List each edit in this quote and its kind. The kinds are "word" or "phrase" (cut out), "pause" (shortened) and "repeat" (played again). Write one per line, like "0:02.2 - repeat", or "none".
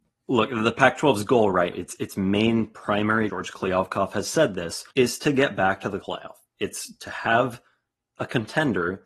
0:01.7 - word
0:03.3 - phrase
0:04.9 - pause
0:06.0 - phrase

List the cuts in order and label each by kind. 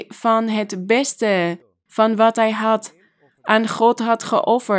none

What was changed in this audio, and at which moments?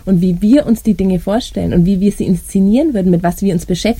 none

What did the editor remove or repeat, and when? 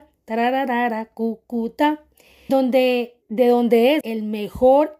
0:02.5 - word
0:03.2 - pause
0:04.0 - phrase

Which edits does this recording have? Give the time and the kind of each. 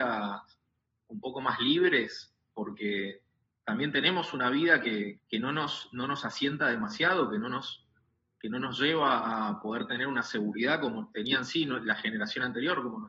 0:05.2 - word

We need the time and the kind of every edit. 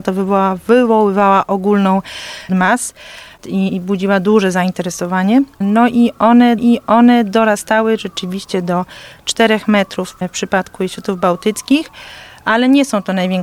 0:02.5 - phrase
0:03.7 - word
0:06.6 - repeat

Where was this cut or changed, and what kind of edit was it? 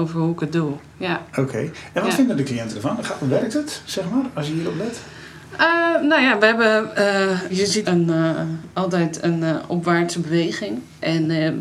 0:07.5 - word
0:07.8 - word

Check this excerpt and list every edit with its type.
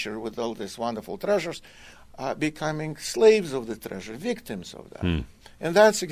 none

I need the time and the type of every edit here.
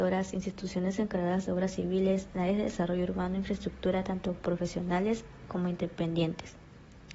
none

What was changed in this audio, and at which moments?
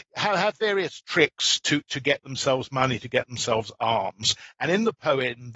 none

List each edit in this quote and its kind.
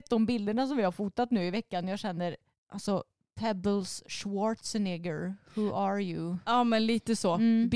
none

